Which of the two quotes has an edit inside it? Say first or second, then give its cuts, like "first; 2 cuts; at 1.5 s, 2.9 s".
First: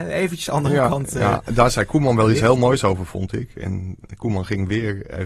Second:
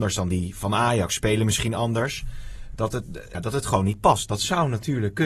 second; 1 cut; at 3.3 s